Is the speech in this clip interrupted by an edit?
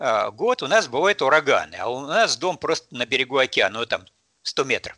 no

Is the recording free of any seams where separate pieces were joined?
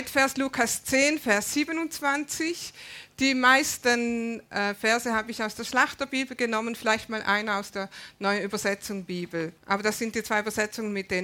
no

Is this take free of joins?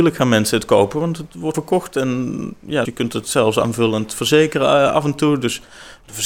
no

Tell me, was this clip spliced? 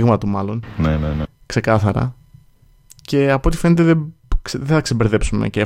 no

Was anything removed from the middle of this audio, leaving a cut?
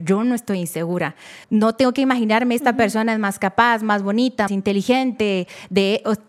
yes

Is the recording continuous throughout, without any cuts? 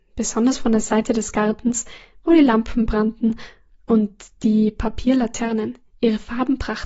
yes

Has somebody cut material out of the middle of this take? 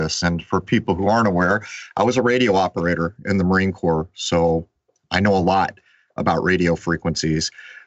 no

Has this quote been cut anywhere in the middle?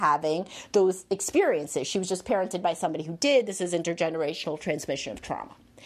no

